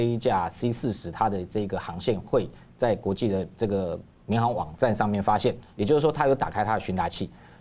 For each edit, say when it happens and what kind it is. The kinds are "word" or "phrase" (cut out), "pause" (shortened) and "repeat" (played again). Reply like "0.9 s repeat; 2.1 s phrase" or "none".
none